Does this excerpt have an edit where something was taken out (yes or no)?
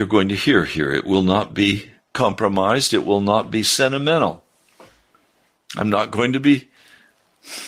no